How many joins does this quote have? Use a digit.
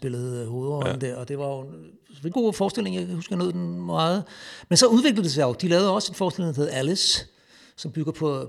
1